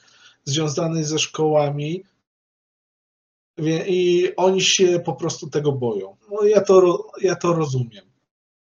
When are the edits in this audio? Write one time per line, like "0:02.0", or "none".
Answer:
0:06.2